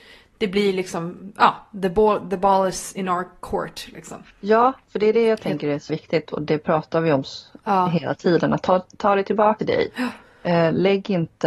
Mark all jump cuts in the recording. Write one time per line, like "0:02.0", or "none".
0:04.3
0:05.9
0:09.6

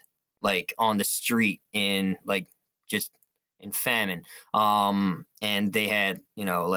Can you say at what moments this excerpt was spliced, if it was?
none

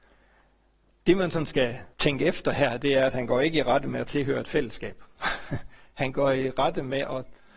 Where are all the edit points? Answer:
0:01.9

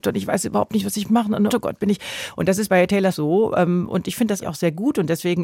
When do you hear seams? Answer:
0:01.5
0:02.7
0:03.1
0:04.4

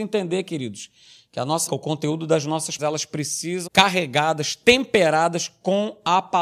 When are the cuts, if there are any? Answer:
0:01.7
0:02.8
0:03.7

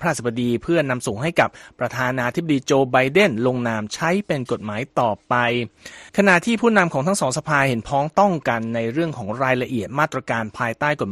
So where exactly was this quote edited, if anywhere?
0:06.1

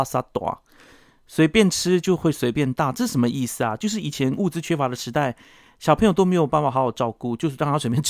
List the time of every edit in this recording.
none

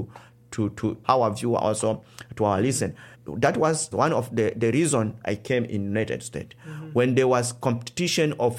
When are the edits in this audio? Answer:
0:01.0
0:03.1
0:03.9

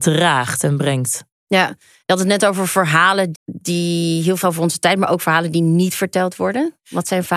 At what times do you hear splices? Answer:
0:03.3
0:04.4

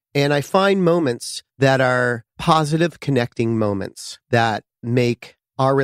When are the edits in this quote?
0:01.5
0:04.2

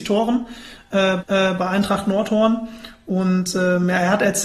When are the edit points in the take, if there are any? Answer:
0:01.2

